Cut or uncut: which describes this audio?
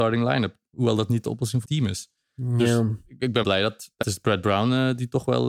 cut